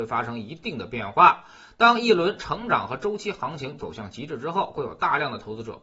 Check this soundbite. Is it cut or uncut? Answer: uncut